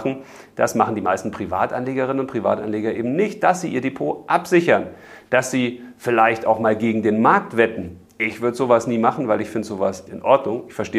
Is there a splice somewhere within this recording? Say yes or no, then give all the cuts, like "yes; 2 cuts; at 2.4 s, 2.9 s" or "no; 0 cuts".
yes; 1 cut; at 10.1 s